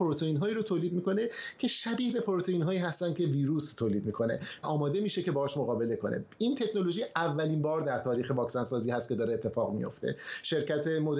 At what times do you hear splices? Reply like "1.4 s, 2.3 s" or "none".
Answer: 4.6 s